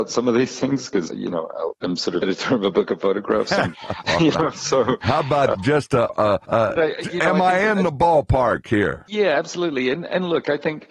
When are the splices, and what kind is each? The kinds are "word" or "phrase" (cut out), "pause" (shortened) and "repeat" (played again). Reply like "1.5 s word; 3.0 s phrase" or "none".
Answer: 1.1 s word; 1.7 s word; 2.2 s word; 3.7 s word; 5.5 s word; 6.1 s word; 6.8 s word

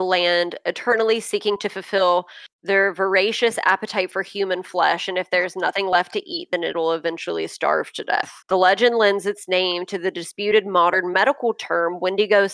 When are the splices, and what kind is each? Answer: 2.5 s pause; 8.4 s pause

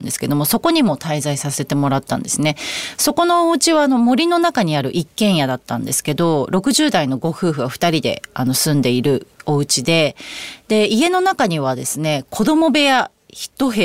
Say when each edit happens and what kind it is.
none

